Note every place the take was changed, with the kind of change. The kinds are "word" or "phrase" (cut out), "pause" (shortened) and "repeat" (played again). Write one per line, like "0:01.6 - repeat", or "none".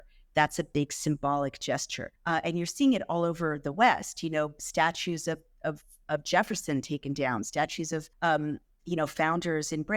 0:02.1 - pause
0:08.1 - pause